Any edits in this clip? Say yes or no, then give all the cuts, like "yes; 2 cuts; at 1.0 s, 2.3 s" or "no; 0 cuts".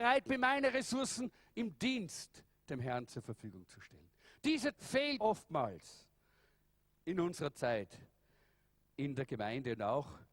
yes; 2 cuts; at 4.7 s, 5.2 s